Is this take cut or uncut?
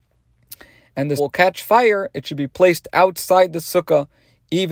cut